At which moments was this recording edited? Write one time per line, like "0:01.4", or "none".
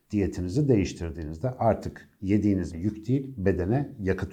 0:02.7

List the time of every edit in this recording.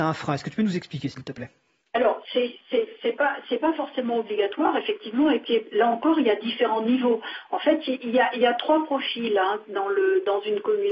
0:01.8

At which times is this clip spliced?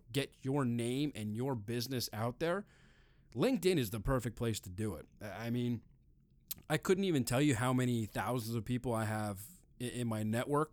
none

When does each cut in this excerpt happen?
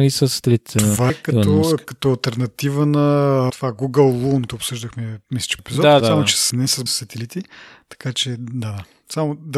0:01.1
0:03.5
0:04.5
0:05.6
0:06.0
0:06.5
0:06.9

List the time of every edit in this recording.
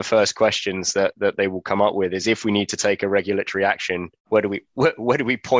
0:04.2

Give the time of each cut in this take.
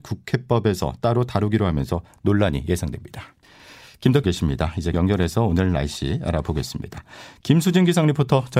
0:04.2
0:04.9

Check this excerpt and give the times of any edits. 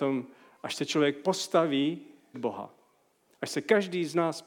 0:02.3

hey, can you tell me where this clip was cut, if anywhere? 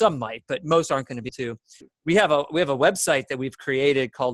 0:01.3
0:01.8

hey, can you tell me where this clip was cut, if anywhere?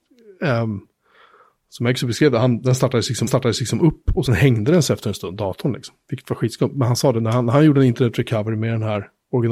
0:03.3
0:04.3

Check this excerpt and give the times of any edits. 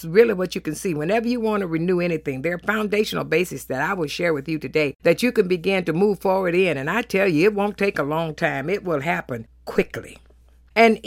none

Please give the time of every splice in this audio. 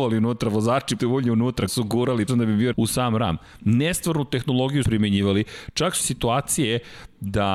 0:01.0
0:01.7
0:02.3
0:02.7
0:04.8
0:06.0

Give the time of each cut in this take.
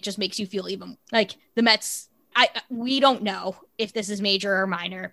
0:00.9
0:02.3

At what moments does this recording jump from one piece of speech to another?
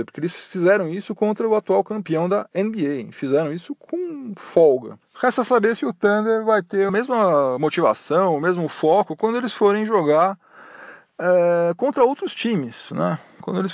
0:06.9

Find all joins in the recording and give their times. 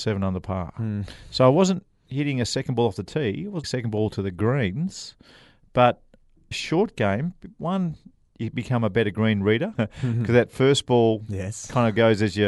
0:03.6
0:06.5
0:09.7

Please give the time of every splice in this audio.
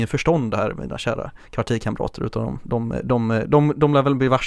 0:01.4

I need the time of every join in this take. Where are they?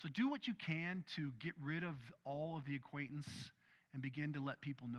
none

